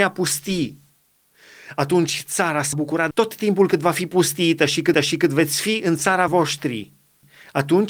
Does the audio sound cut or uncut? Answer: cut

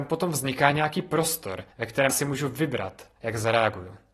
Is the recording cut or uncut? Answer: cut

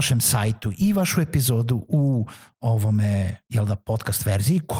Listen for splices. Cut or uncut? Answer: uncut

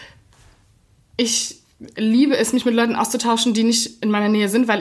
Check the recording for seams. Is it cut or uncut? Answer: uncut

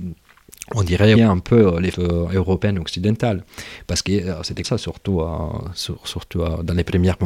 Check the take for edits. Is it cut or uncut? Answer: cut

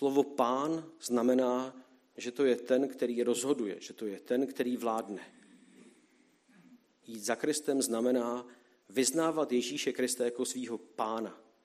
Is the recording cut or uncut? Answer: uncut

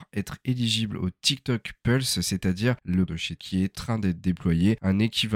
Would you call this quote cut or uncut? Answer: cut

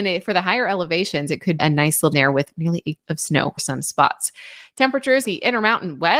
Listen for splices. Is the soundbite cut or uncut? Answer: cut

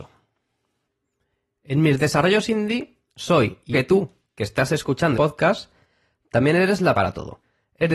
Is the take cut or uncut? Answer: cut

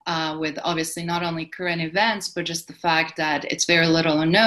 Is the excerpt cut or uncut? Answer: uncut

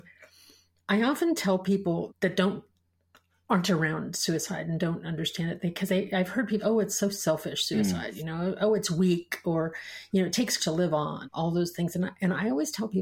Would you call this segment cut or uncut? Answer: cut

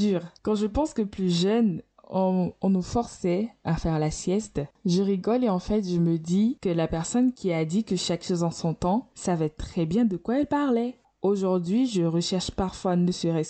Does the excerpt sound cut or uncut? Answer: uncut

